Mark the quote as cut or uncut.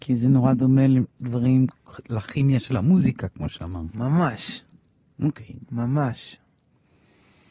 uncut